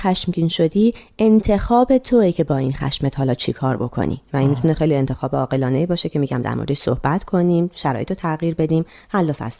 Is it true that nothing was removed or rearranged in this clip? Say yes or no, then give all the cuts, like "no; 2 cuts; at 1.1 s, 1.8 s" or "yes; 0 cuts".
yes; 0 cuts